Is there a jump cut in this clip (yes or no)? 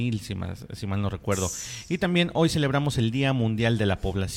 no